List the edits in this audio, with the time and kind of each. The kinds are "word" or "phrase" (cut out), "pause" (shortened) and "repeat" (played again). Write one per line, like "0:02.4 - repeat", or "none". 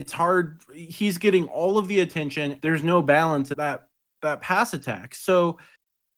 0:02.6 - word
0:03.5 - word